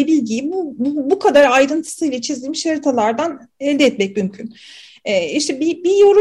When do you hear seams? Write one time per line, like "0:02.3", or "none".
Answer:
none